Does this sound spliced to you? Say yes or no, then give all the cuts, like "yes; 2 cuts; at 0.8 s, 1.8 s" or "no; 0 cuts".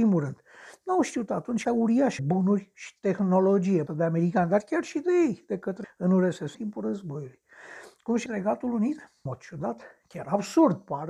yes; 7 cuts; at 1.6 s, 2.2 s, 3.9 s, 5.8 s, 6.5 s, 8.3 s, 9.3 s